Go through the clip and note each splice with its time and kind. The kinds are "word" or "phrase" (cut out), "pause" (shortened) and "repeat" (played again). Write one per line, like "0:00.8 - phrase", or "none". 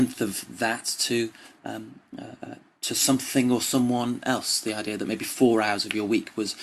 none